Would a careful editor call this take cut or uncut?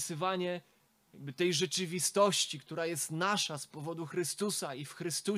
uncut